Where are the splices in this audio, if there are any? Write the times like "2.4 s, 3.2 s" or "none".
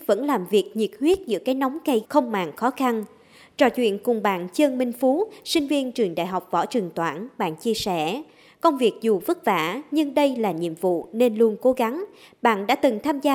2.0 s